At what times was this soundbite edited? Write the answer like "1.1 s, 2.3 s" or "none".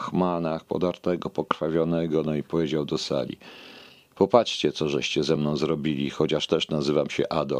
none